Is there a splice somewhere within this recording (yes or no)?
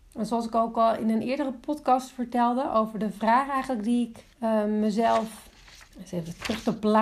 yes